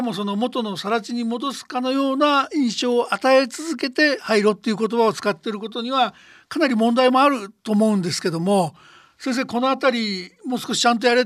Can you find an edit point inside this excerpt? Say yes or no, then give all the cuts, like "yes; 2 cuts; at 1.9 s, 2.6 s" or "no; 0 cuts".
no; 0 cuts